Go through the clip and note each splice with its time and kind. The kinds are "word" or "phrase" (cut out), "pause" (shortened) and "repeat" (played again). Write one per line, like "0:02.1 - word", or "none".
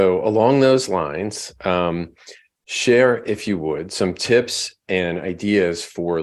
none